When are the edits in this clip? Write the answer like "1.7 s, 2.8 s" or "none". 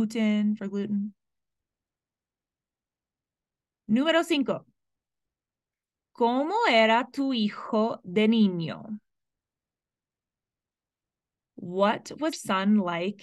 12.3 s